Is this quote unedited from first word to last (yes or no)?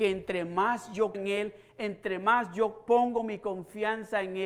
no